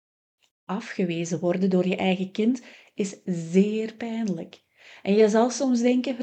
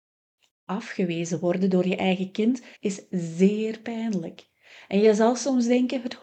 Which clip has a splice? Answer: second; 1 cut; at 2.8 s

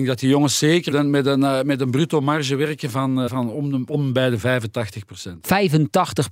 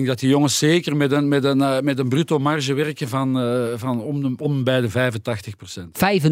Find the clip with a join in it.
first; 2 cuts; at 0.9 s, 3.3 s

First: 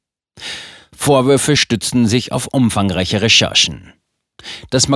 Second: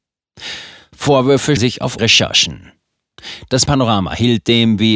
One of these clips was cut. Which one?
second; 3 cuts; at 1.6 s, 2.0 s, 3.7 s

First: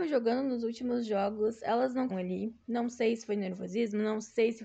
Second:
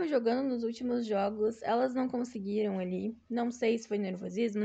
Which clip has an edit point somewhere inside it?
first; 1 cut; at 2.1 s

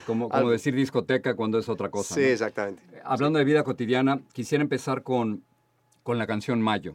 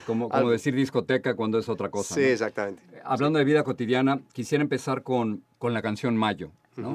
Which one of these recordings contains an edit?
second; 1 cut; at 5.5 s

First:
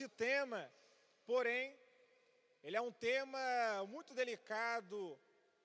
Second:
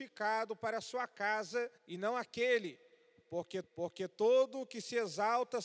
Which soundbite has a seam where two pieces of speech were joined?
second; 2 cuts; at 1.8 s, 3.6 s

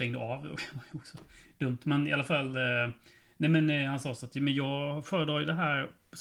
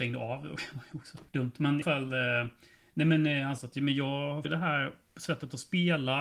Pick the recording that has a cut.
second; 4 cuts; at 1.3 s, 1.8 s, 3.6 s, 4.4 s

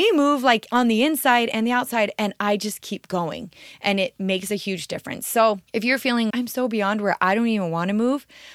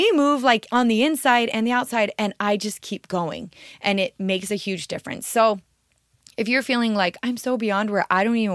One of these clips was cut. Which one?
first; 2 cuts; at 5.7 s, 6.3 s

